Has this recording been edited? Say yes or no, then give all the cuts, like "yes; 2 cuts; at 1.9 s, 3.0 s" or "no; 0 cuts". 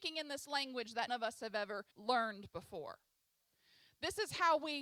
yes; 2 cuts; at 1.1 s, 1.9 s